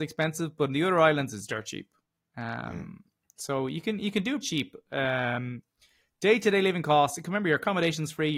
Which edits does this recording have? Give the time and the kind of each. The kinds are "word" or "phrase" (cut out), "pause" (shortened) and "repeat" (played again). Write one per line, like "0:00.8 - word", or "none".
0:04.4 - word